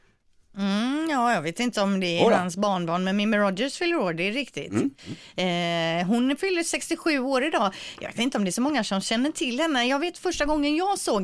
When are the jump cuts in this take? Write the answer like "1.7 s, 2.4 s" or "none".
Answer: none